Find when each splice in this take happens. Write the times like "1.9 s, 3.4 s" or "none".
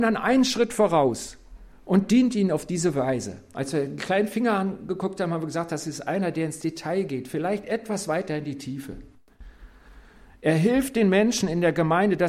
none